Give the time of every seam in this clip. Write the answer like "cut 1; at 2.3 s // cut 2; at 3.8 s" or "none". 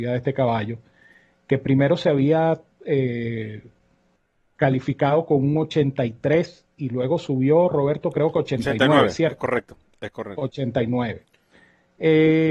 none